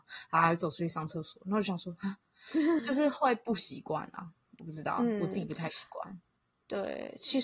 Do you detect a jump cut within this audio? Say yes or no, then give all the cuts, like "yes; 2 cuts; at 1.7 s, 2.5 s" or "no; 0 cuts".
yes; 1 cut; at 2.8 s